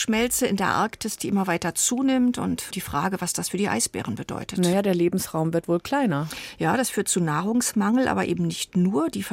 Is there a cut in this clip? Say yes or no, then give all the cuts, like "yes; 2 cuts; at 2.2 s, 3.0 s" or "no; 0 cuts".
yes; 1 cut; at 2.7 s